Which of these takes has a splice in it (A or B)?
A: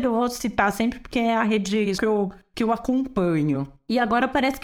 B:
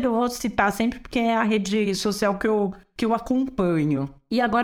A